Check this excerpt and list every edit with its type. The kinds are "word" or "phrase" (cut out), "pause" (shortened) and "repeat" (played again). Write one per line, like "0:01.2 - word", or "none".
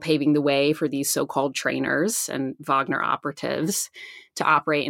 none